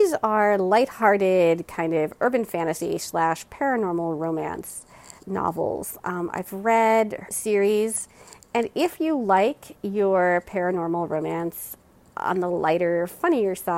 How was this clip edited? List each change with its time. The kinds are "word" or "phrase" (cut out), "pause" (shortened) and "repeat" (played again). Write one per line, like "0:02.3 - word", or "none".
0:05.2 - pause
0:07.3 - phrase